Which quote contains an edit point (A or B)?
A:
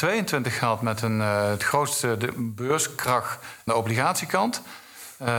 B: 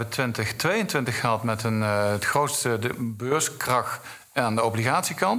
A